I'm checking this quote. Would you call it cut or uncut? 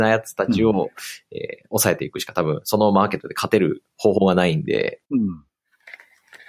cut